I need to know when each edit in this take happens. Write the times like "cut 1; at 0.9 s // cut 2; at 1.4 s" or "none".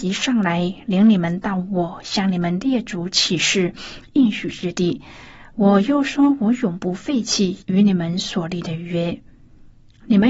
cut 1; at 7.6 s

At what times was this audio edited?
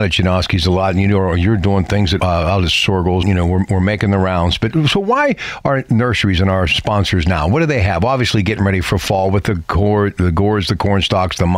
cut 1; at 2.2 s // cut 2; at 3.2 s

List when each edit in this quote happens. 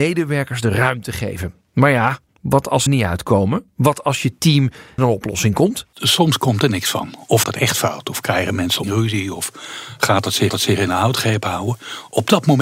cut 1; at 2.3 s // cut 2; at 2.9 s // cut 3; at 5.0 s // cut 4; at 7.4 s // cut 5; at 8.8 s // cut 6; at 10.5 s

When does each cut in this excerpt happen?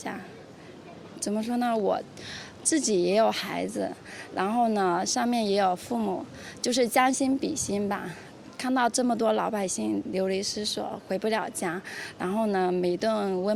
cut 1; at 1.2 s // cut 2; at 2.6 s

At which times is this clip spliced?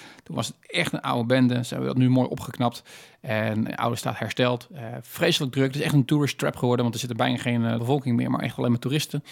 cut 1; at 3.7 s // cut 2; at 7.8 s

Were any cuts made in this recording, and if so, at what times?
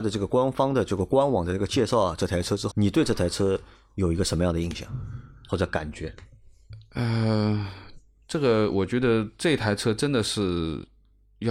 cut 1; at 2.7 s

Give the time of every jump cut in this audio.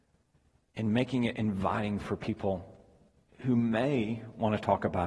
none

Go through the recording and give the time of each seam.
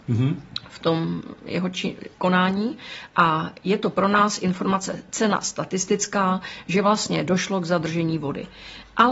none

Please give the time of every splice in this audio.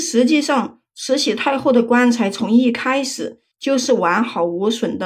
cut 1; at 3.5 s

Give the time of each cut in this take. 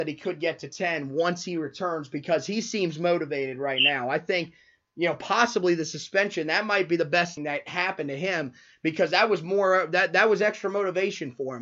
cut 1; at 7.4 s

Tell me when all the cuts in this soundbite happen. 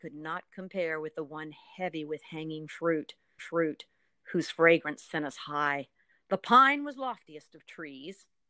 cut 1; at 3.4 s // cut 2; at 6.1 s

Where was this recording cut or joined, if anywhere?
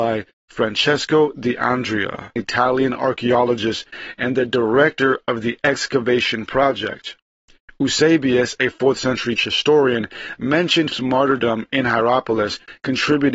cut 1; at 2.4 s // cut 2; at 9.4 s // cut 3; at 10.9 s

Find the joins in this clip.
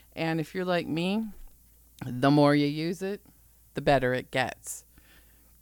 cut 1; at 3.4 s

